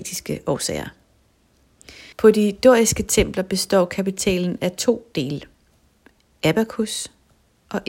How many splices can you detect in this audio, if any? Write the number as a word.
one